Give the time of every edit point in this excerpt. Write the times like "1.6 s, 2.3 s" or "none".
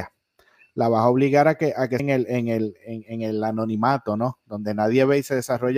2.0 s